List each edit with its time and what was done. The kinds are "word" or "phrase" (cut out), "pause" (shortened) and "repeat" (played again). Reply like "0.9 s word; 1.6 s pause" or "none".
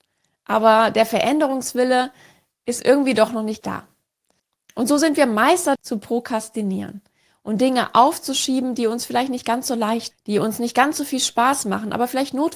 3.6 s word; 5.8 s word; 10.1 s word